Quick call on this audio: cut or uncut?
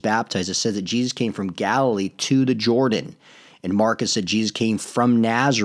uncut